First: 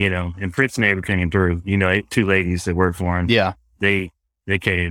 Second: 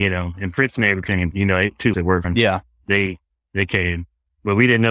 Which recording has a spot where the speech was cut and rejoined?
second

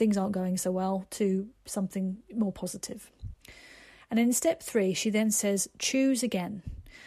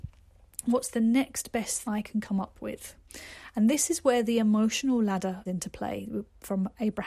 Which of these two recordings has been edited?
second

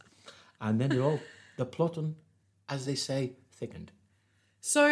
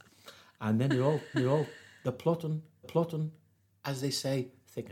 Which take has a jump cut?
second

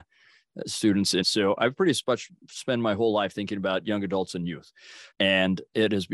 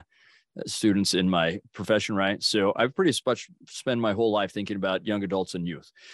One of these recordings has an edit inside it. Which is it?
first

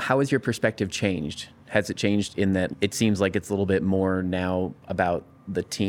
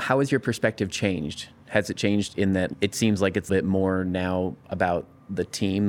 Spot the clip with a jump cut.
second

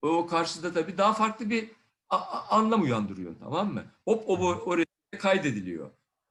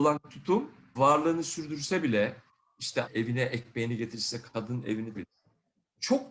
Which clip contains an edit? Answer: second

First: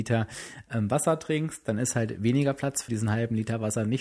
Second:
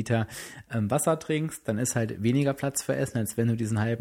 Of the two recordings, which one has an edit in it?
first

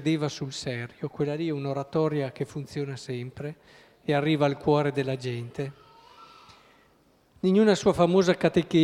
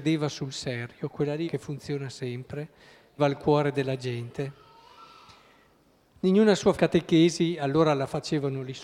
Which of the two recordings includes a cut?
second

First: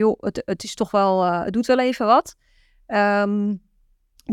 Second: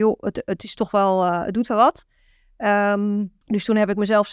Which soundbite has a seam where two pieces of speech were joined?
second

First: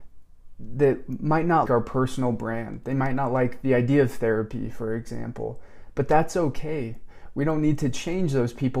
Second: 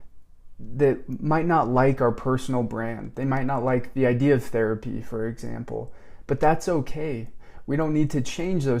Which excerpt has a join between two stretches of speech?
first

